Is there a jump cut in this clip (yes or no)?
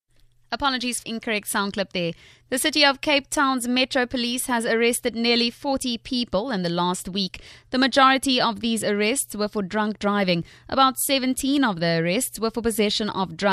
yes